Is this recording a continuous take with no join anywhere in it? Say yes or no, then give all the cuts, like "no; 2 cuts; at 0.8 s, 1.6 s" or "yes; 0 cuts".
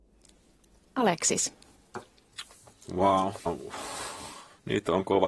no; 1 cut; at 3.5 s